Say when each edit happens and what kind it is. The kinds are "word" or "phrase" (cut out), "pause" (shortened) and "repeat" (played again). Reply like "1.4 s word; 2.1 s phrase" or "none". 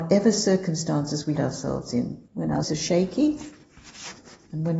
1.4 s word; 2.3 s pause; 2.6 s word